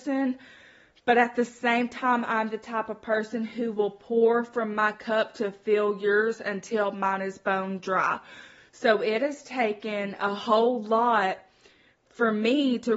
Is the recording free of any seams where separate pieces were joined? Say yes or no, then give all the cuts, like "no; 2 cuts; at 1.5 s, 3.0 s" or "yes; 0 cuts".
yes; 0 cuts